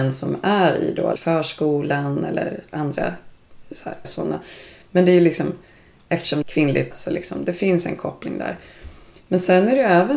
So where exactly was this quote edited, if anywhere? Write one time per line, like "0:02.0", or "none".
0:01.2
0:04.0
0:06.4
0:06.9